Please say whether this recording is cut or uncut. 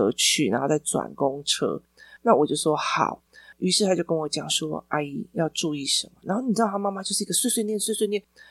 uncut